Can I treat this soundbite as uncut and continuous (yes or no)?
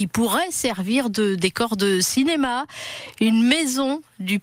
yes